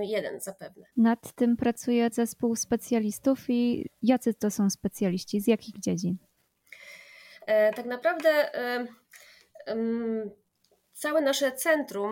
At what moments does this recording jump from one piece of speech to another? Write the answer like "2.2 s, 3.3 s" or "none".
0.9 s, 1.6 s, 2.1 s

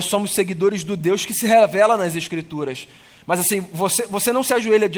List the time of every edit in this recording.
none

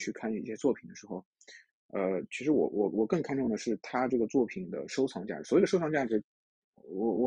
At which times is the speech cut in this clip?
none

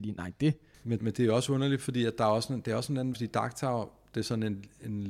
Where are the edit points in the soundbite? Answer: 1.0 s, 3.1 s

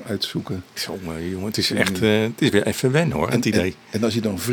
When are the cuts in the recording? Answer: none

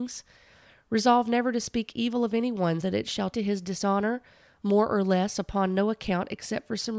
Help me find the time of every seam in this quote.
2.8 s, 3.3 s

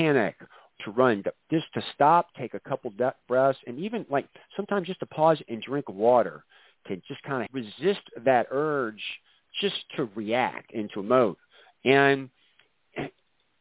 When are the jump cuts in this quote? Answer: 7.5 s

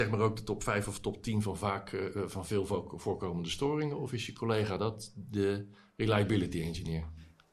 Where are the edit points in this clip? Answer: none

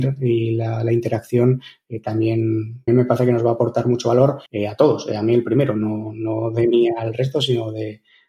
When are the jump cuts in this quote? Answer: 2.9 s, 4.5 s

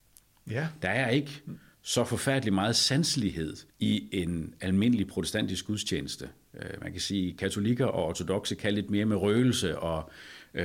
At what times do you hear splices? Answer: 3.7 s

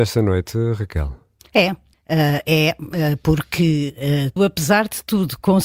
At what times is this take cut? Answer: 1.9 s, 4.4 s

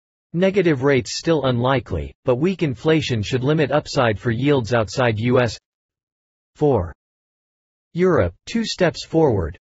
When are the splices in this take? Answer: 8.4 s

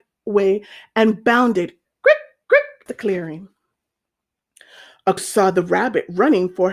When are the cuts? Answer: 1.8 s, 2.9 s, 5.2 s

